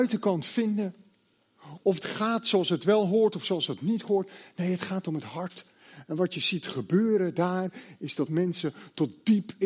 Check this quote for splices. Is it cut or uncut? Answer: cut